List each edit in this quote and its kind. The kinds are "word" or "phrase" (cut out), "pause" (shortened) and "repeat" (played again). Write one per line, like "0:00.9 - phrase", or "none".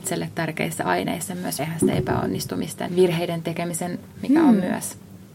0:01.6 - word
0:02.9 - word
0:04.1 - word